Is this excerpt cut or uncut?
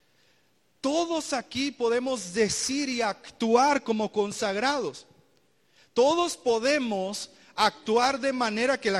uncut